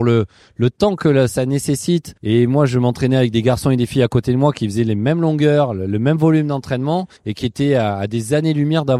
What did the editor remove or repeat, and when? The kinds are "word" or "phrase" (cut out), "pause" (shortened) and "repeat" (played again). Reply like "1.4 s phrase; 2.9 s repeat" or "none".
2.2 s pause; 7.2 s pause